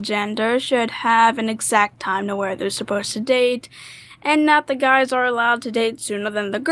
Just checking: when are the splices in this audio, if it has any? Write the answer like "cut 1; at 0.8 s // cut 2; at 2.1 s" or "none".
none